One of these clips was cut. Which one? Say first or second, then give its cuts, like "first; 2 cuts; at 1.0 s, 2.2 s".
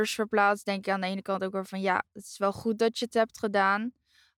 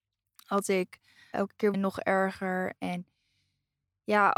second; 2 cuts; at 1.3 s, 1.7 s